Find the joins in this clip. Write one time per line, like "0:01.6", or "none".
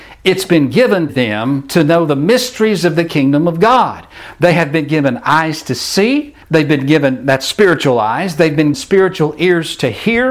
0:01.1
0:06.4
0:08.7